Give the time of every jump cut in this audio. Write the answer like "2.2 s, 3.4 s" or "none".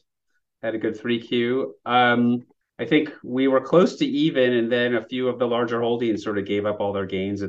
2.6 s